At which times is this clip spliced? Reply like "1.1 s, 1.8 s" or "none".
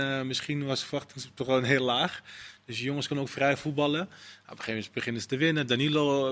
none